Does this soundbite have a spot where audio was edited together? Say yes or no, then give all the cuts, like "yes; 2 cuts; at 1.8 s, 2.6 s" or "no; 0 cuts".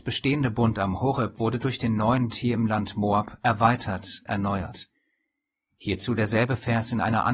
yes; 2 cuts; at 2.3 s, 4.3 s